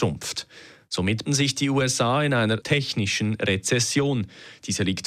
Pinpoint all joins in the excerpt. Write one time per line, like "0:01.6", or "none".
0:01.2
0:02.6